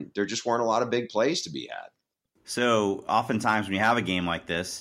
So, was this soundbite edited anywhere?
no; 0 cuts

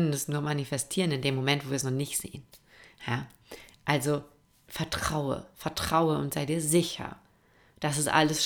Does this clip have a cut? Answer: no; 0 cuts

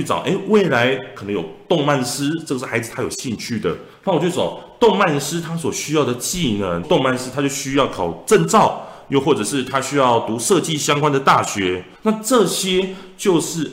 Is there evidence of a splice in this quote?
yes; 1 cut; at 6.8 s

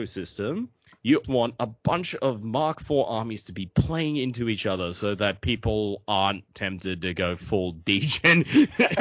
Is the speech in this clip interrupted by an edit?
yes; 1 cut; at 1.2 s

